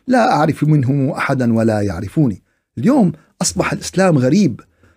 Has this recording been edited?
no; 0 cuts

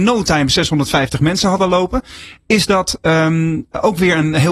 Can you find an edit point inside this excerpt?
no; 0 cuts

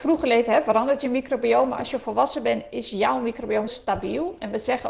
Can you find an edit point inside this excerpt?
yes; 1 cut; at 3.7 s

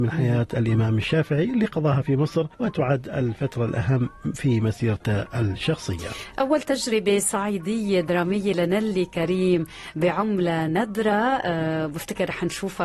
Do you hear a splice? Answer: yes; 1 cut; at 2.5 s

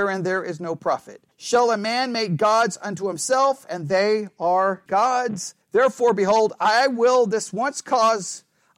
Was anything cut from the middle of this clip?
yes; 3 cuts; at 1.3 s, 4.9 s, 5.6 s

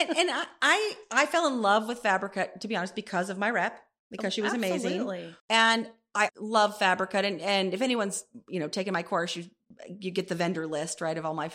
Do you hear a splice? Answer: yes; 2 cuts; at 5.4 s, 6.3 s

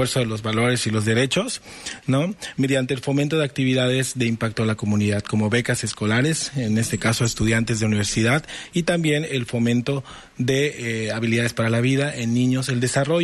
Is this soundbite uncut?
yes; 0 cuts

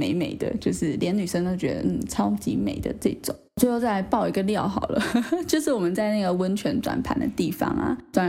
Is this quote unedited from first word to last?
no; 1 cut; at 3.5 s

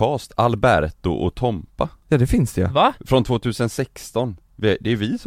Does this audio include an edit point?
yes; 2 cuts; at 2.0 s, 3.0 s

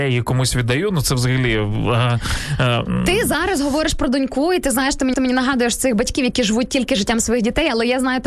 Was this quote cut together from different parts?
yes; 1 cut; at 5.1 s

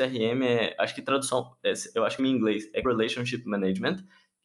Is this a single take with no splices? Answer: no; 2 cuts; at 2.2 s, 2.8 s

